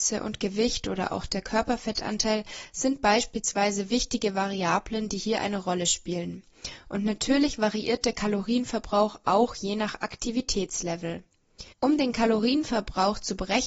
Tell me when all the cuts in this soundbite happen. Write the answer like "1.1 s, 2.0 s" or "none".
11.7 s